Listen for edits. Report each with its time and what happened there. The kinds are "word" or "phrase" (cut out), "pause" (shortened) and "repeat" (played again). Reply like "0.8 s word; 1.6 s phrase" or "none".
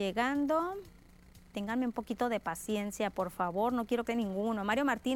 1.5 s pause; 4.1 s phrase